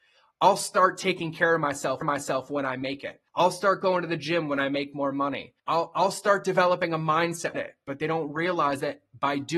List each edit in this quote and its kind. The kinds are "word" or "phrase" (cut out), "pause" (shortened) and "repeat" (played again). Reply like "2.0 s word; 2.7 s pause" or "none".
2.0 s repeat; 3.3 s pause; 5.6 s pause; 7.5 s phrase